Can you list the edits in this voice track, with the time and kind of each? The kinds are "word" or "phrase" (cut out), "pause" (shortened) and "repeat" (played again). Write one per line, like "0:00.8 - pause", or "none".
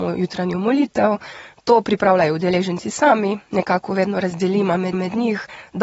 0:04.9 - repeat